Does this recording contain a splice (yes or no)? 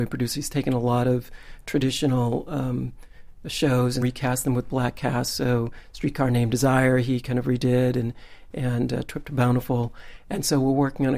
yes